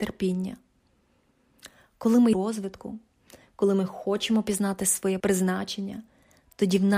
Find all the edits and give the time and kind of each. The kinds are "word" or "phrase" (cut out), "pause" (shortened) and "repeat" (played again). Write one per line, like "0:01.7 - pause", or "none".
0:02.3 - phrase
0:05.2 - word